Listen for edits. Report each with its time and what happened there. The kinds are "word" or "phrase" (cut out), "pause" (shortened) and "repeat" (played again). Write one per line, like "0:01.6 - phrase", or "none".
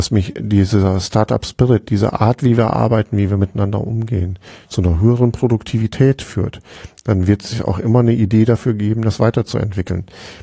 none